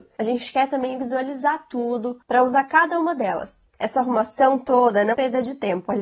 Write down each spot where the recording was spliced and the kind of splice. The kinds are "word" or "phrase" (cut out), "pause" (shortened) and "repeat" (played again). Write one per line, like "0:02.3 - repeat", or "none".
0:05.1 - word